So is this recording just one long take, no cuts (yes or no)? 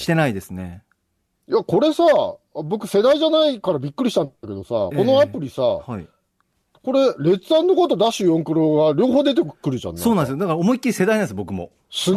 yes